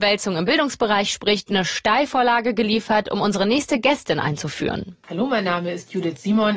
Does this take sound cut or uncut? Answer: uncut